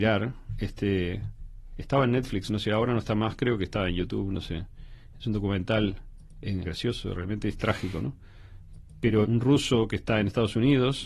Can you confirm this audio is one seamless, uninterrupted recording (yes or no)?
no